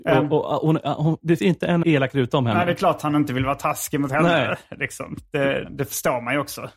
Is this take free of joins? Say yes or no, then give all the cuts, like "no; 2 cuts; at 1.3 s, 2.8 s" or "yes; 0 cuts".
no; 3 cuts; at 1.4 s, 1.8 s, 5.6 s